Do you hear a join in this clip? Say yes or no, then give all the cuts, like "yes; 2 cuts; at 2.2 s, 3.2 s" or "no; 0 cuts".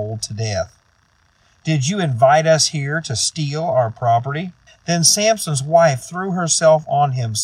yes; 1 cut; at 4.7 s